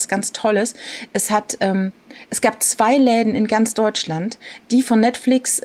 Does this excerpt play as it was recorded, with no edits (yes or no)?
yes